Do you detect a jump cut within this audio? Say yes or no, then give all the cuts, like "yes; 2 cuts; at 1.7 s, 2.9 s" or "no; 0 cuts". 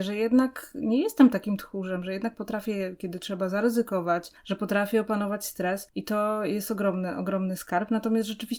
no; 0 cuts